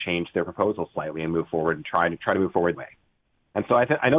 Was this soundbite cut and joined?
yes; 1 cut; at 2.7 s

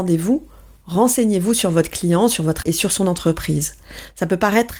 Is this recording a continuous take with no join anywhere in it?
no; 1 cut; at 2.6 s

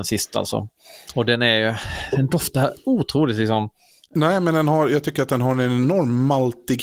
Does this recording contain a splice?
no; 0 cuts

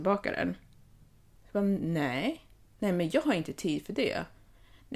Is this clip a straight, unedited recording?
yes; 0 cuts

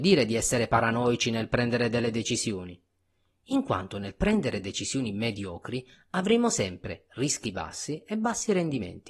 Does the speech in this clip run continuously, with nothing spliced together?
yes; 0 cuts

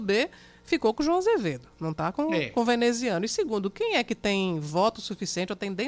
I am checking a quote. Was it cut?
no; 0 cuts

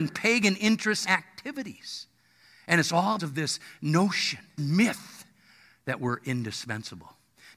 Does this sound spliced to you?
yes; 3 cuts; at 1.1 s, 3.2 s, 4.6 s

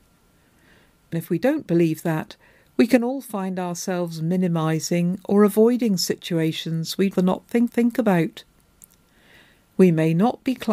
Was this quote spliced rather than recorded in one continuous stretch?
yes; 3 cuts; at 1.1 s, 7.1 s, 7.7 s

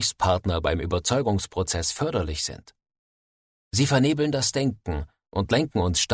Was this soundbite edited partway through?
no; 0 cuts

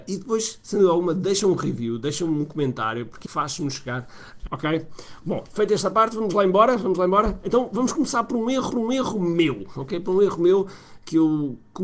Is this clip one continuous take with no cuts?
no; 3 cuts; at 3.3 s, 4.5 s, 8.7 s

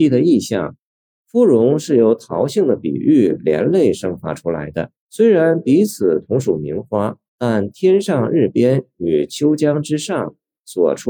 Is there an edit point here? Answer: yes; 2 cuts; at 5.0 s, 7.3 s

